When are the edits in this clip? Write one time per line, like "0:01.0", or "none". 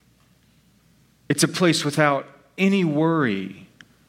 none